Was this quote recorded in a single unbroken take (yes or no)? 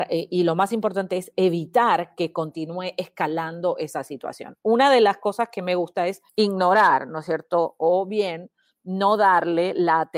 no